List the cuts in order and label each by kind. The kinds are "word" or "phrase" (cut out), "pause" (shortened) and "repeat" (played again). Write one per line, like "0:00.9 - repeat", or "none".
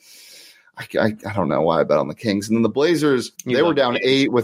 0:03.4 - pause